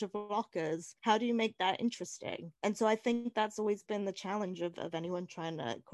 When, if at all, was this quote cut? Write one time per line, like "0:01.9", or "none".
0:01.0
0:02.6